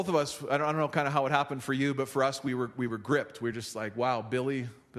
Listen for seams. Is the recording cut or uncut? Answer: uncut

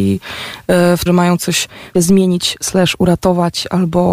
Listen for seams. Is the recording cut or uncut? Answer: cut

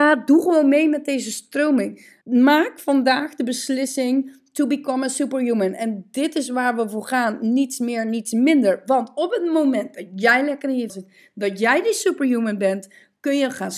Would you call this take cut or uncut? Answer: cut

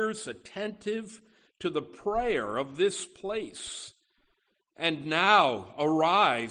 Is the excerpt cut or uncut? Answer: uncut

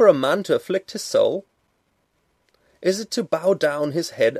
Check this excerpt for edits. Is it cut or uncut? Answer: uncut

